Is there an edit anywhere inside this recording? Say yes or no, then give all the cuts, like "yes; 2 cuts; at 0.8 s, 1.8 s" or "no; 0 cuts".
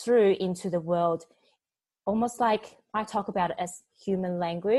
no; 0 cuts